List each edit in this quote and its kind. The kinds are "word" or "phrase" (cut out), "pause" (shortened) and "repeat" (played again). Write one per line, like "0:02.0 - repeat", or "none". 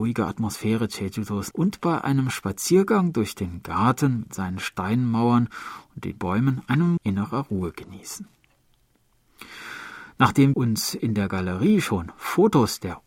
0:01.5 - word
0:06.2 - word
0:07.0 - word
0:10.5 - word